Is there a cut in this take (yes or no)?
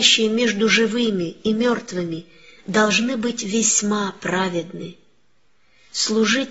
no